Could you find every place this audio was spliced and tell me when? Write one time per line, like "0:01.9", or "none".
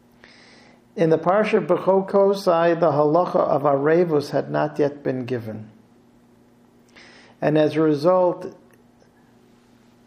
none